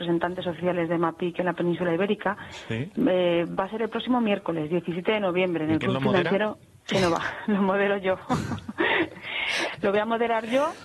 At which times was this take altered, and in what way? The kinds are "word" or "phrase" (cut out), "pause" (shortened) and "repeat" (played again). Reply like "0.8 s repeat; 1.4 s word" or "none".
6.8 s pause